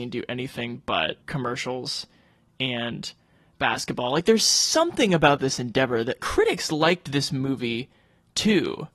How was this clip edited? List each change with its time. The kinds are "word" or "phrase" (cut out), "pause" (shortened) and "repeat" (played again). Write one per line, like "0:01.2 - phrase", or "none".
0:01.2 - pause
0:06.2 - word